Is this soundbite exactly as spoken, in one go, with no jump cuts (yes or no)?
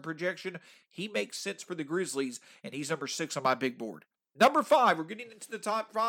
yes